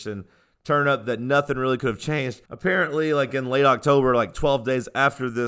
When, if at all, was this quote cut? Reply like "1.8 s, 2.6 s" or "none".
2.5 s